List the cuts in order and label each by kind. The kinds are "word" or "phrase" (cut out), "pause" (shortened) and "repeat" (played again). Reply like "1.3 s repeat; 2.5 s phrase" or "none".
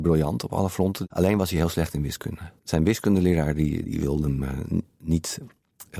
2.6 s pause; 3.8 s word